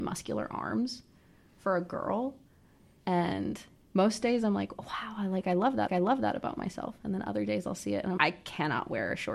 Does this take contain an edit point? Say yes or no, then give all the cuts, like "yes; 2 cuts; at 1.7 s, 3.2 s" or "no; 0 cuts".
yes; 2 cuts; at 5.9 s, 8.2 s